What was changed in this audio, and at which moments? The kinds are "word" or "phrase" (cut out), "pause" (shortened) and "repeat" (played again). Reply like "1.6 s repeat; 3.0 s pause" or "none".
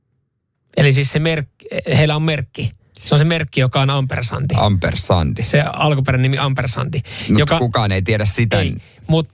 none